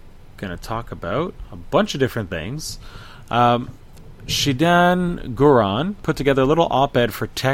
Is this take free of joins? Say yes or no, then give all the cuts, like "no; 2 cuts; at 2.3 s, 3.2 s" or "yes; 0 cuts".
no; 1 cut; at 6.0 s